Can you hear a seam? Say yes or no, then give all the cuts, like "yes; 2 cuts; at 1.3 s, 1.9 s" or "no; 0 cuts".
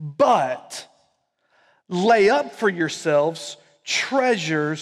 no; 0 cuts